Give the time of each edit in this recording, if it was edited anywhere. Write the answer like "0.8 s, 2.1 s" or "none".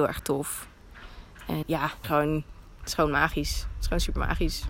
1.6 s, 2.0 s